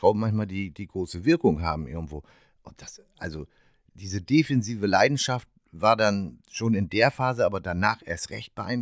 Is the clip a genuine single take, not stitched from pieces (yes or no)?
yes